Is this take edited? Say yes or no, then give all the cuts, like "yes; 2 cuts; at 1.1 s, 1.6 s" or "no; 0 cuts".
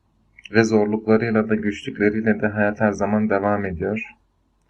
no; 0 cuts